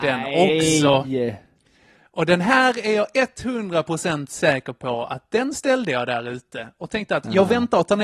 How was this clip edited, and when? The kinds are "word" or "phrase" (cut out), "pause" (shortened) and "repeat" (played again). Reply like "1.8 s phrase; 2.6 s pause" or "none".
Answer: none